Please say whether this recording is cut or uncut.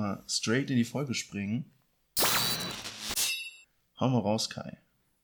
cut